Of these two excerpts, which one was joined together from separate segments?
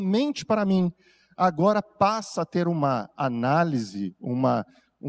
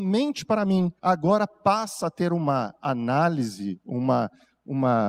second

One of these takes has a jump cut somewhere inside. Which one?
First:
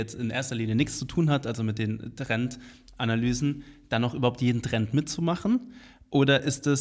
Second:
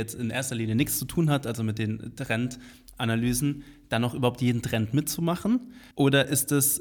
second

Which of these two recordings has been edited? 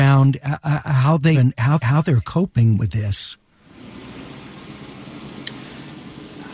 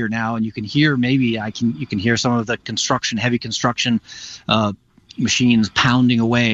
first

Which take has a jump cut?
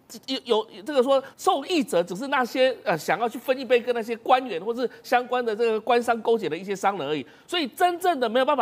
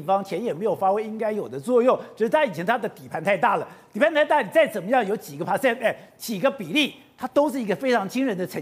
first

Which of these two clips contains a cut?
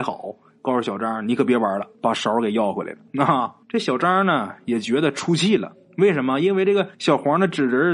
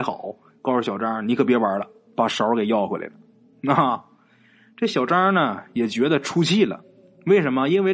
first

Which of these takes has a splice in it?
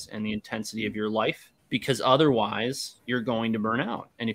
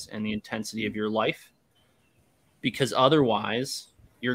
first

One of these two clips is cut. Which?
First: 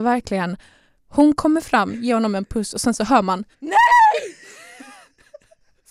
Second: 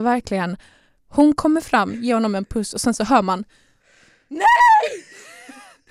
first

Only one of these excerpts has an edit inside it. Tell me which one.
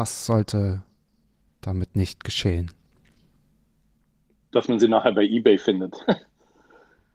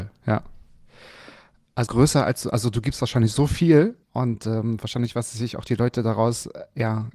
second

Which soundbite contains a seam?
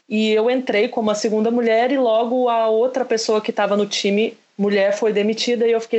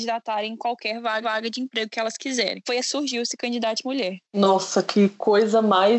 second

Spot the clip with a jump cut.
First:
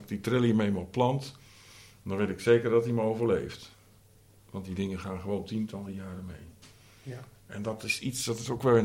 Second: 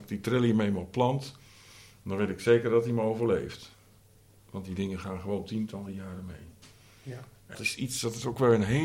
second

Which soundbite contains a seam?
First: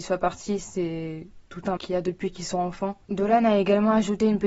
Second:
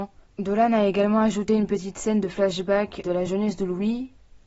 first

